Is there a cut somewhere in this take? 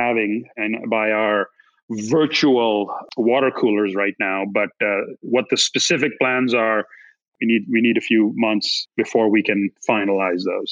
no; 0 cuts

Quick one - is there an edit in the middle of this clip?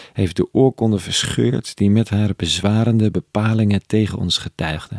no; 0 cuts

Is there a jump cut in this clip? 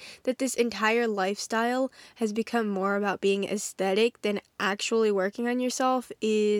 no; 0 cuts

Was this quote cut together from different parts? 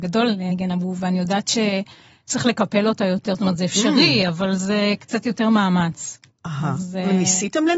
yes; 1 cut; at 6.3 s

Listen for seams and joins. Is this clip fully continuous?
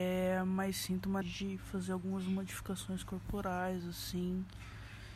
no; 1 cut; at 1.2 s

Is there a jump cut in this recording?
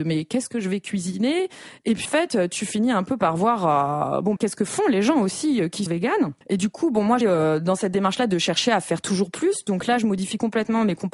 yes; 5 cuts; at 2.0 s, 4.4 s, 5.9 s, 6.4 s, 7.2 s

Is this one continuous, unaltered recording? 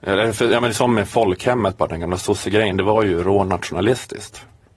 yes; 0 cuts

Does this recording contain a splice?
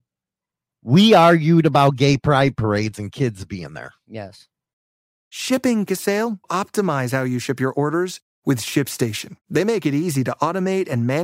yes; 3 cuts; at 5.9 s, 6.4 s, 9.4 s

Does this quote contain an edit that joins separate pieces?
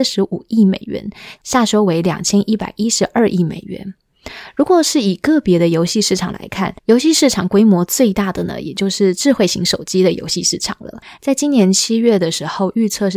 yes; 1 cut; at 6.8 s

